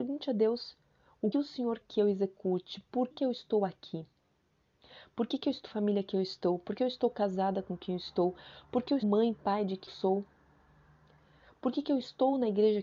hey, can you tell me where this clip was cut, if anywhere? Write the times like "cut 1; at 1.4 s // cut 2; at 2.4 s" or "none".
cut 1; at 1.3 s // cut 2; at 1.8 s // cut 3; at 3.1 s // cut 4; at 5.7 s // cut 5; at 9.0 s // cut 6; at 9.9 s